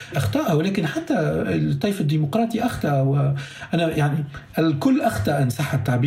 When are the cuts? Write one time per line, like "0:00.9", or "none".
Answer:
none